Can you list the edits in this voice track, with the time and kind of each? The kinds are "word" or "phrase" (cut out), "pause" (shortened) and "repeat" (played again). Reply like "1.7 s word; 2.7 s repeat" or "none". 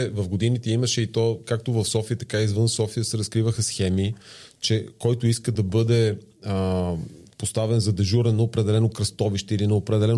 none